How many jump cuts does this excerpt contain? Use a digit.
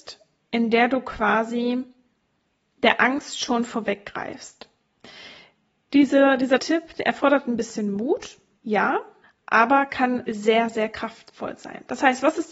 3